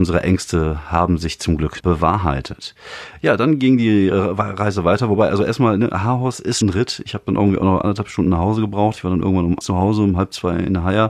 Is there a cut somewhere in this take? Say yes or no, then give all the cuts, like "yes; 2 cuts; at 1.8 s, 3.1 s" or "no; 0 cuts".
yes; 3 cuts; at 1.8 s, 6.6 s, 9.6 s